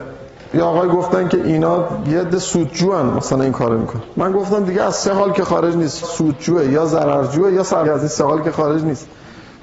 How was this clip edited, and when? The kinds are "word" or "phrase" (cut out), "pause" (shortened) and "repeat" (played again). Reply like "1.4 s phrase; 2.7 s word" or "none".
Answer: 6.0 s word; 7.8 s phrase